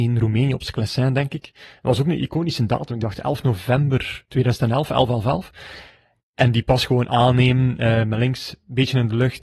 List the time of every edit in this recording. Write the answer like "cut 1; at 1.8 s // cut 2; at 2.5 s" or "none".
none